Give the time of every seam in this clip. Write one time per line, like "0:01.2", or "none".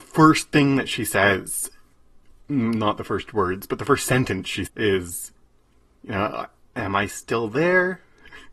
0:04.7